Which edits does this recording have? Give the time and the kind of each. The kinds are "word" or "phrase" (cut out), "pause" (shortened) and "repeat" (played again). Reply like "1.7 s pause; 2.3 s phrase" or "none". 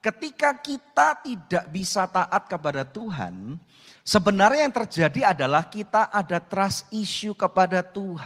none